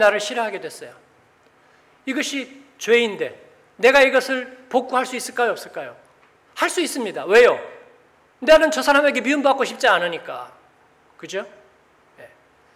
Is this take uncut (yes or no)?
yes